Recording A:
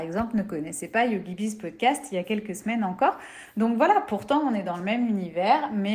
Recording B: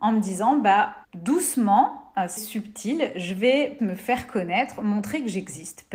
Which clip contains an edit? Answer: B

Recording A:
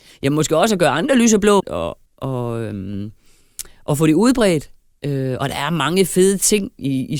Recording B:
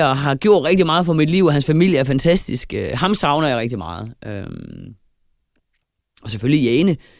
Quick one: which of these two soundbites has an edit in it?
A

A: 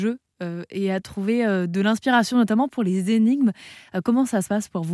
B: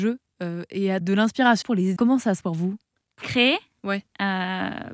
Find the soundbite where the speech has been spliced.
B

